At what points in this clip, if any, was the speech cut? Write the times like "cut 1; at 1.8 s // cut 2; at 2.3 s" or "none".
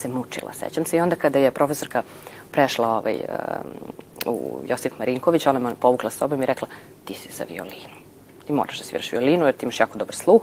none